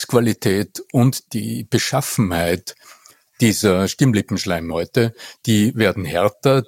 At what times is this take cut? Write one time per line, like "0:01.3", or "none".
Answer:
none